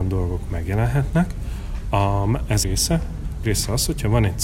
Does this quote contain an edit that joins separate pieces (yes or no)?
yes